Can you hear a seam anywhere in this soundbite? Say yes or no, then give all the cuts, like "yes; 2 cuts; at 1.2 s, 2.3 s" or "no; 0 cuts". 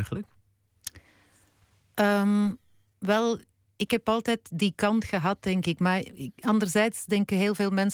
no; 0 cuts